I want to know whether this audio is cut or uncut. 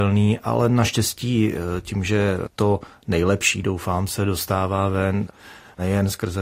uncut